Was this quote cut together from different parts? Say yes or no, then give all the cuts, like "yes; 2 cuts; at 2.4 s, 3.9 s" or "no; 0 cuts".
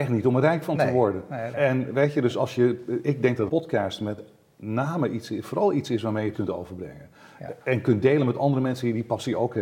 yes; 3 cuts; at 1.5 s, 3.5 s, 6.3 s